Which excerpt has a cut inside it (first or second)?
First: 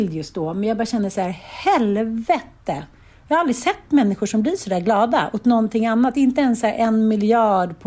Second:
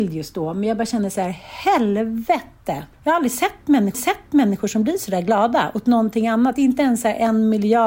second